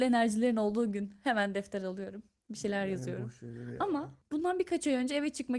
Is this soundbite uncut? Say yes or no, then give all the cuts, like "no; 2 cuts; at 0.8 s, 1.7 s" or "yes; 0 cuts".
yes; 0 cuts